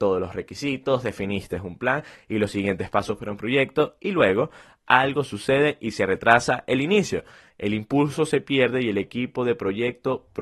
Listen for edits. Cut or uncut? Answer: uncut